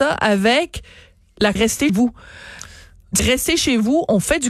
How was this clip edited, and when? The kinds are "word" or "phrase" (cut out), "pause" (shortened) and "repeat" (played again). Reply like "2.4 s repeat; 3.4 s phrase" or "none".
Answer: 1.6 s word; 1.9 s word; 3.2 s phrase